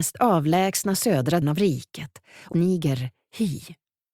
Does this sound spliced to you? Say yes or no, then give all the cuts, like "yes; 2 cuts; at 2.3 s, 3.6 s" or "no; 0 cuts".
yes; 2 cuts; at 1.4 s, 2.5 s